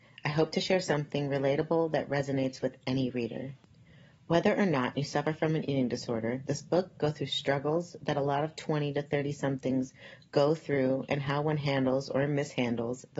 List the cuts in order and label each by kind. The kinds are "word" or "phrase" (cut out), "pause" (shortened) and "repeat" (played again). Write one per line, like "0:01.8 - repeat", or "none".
none